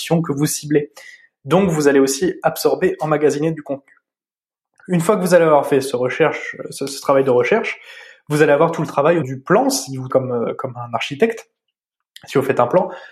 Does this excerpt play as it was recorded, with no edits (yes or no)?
no